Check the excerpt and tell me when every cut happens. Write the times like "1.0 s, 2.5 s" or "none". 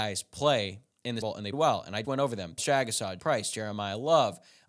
1.2 s, 1.5 s, 2.0 s, 2.6 s, 3.2 s